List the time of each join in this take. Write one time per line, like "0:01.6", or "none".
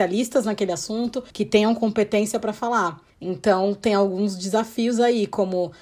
0:01.3
0:03.1